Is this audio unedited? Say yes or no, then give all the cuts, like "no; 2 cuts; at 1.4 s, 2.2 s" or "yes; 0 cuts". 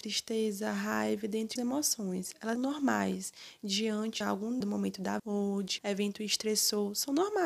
no; 6 cuts; at 1.6 s, 2.6 s, 4.2 s, 4.6 s, 5.2 s, 5.8 s